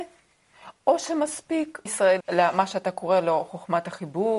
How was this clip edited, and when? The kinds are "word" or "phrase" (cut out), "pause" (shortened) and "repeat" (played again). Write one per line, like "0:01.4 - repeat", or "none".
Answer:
0:01.9 - word
0:02.2 - word